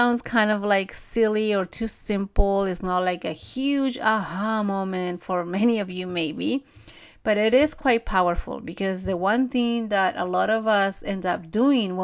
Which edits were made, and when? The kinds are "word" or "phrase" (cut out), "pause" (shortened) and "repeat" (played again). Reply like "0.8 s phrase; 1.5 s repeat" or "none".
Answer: none